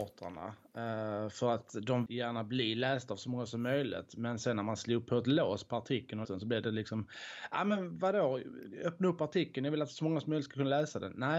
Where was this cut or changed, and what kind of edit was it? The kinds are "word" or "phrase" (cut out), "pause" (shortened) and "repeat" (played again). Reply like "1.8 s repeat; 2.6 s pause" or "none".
2.1 s phrase; 6.2 s word